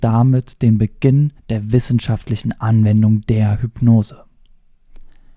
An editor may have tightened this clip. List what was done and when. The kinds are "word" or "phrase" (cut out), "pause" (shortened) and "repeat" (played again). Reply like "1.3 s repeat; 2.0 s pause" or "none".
1.4 s pause